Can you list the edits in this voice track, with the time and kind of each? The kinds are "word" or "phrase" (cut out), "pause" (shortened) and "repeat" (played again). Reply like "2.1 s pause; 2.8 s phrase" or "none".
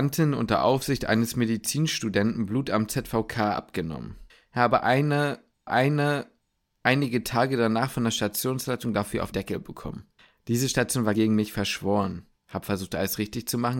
4.3 s pause; 5.7 s repeat; 9.3 s word; 10.2 s pause; 11.1 s word; 12.4 s pause